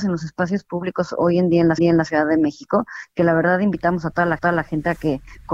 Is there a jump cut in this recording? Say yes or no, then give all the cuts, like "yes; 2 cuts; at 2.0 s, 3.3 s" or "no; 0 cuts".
yes; 2 cuts; at 1.8 s, 4.4 s